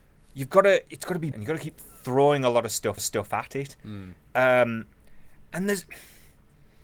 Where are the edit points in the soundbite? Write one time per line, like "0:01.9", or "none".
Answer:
0:01.3
0:03.0

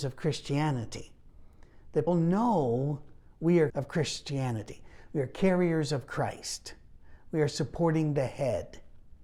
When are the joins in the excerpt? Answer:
0:02.1
0:03.7

